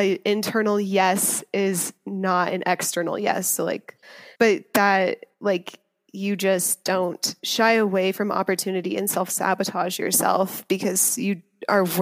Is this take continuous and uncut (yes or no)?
no